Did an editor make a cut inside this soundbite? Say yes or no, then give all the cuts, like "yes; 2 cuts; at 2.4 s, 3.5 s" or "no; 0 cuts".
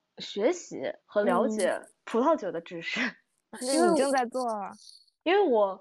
yes; 2 cuts; at 1.0 s, 3.5 s